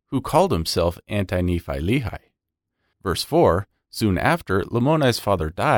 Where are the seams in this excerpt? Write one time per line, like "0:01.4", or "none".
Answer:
none